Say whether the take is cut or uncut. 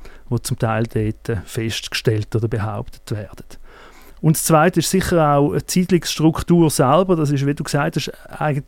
uncut